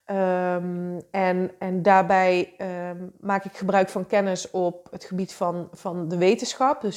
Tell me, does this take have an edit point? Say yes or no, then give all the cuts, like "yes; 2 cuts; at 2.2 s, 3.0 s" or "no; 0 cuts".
no; 0 cuts